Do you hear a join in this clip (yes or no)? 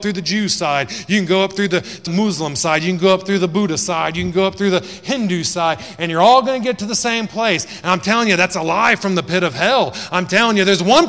yes